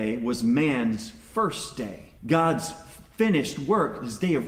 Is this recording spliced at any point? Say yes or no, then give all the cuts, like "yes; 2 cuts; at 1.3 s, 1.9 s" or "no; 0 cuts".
yes; 1 cut; at 2.2 s